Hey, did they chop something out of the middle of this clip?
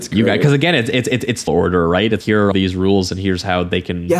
yes; 3 cuts; at 1.5 s, 2.2 s, 2.5 s

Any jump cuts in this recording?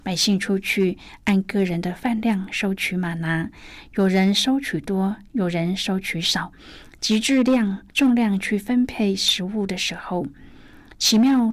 yes; 1 cut; at 7.9 s

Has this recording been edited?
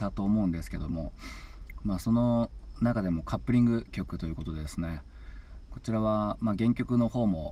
no; 0 cuts

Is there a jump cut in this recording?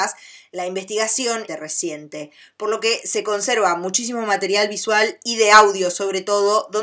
yes; 1 cut; at 1.5 s

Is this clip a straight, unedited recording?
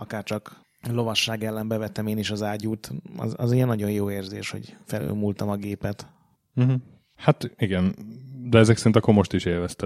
yes; 0 cuts

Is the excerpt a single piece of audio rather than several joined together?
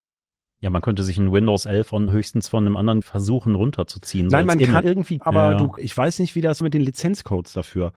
no; 6 cuts; at 2.1 s, 3.0 s, 4.8 s, 5.2 s, 5.8 s, 6.6 s

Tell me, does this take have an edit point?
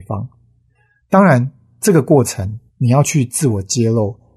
yes; 1 cut; at 2.7 s

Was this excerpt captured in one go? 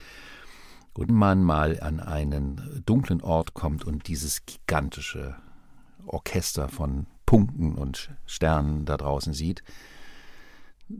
no; 1 cut; at 1.1 s

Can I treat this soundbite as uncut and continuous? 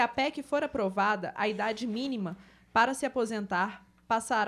yes; 0 cuts

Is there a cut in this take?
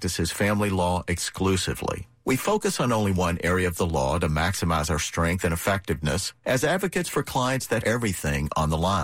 yes; 1 cut; at 7.8 s

